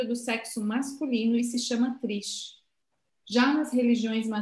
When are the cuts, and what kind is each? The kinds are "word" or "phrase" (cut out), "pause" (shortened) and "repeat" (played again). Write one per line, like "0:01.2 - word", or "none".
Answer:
none